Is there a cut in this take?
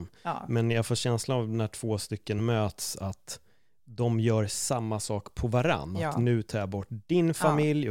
no; 0 cuts

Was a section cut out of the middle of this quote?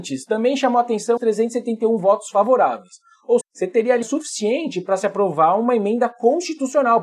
yes; 3 cuts; at 1.2 s, 3.4 s, 4.0 s

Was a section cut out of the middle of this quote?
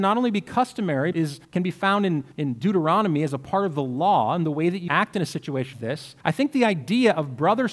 yes; 6 cuts; at 1.1 s, 1.4 s, 2.3 s, 4.9 s, 5.7 s, 6.2 s

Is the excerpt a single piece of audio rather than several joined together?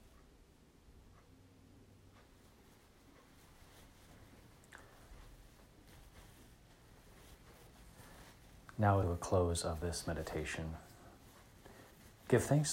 no; 1 cut; at 9.0 s

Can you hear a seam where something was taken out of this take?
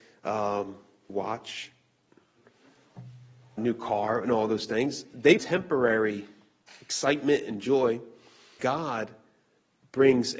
yes; 4 cuts; at 1.1 s, 3.6 s, 5.4 s, 8.6 s

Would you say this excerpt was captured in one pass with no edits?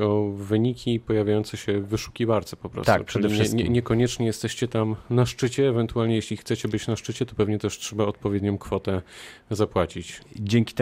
yes; 0 cuts

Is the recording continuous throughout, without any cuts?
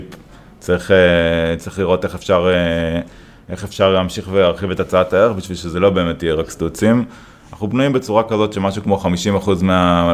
yes; 0 cuts

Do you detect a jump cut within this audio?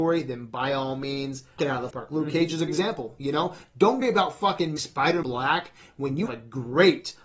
yes; 7 cuts; at 1.6 s, 1.9 s, 2.7 s, 4.0 s, 4.8 s, 5.2 s, 6.3 s

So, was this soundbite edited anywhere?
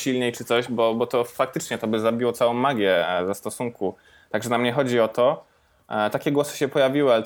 no; 0 cuts

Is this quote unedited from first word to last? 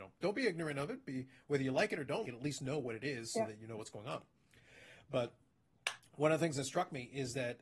no; 1 cut; at 2.2 s

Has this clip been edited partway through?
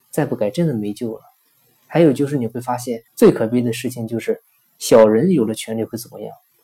yes; 1 cut; at 3.1 s

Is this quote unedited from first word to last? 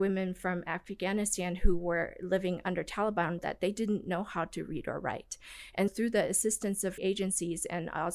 no; 3 cuts; at 3.4 s, 5.9 s, 7.0 s

